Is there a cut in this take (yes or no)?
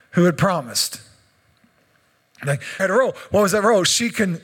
yes